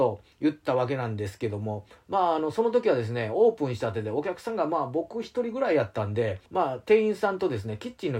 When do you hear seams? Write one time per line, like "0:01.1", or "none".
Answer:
0:06.5

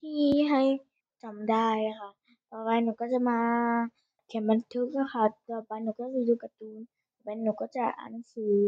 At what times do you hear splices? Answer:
none

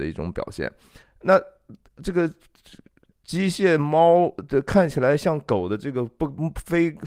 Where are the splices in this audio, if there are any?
0:01.0

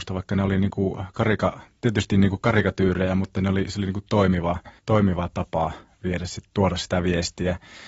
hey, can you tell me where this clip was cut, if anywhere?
0:04.8

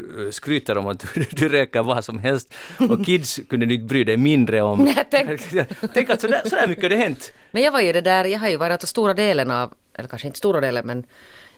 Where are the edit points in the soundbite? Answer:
none

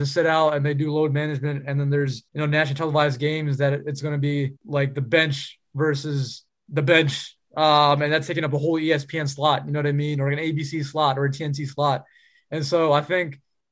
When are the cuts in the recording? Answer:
0:02.3
0:04.6
0:06.5

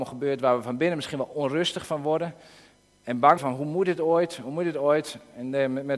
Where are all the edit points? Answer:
0:03.4

